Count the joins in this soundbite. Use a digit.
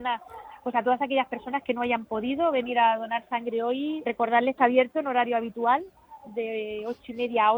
2